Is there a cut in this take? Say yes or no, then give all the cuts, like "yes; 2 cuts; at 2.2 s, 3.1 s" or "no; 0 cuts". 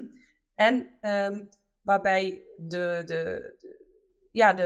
no; 0 cuts